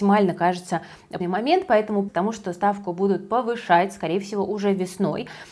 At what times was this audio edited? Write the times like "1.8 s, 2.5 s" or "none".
1.2 s, 2.1 s

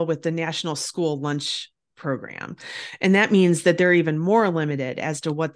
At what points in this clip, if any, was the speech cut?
none

